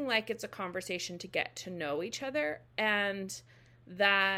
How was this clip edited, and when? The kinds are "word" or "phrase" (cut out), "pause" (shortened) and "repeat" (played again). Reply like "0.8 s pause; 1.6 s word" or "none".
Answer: none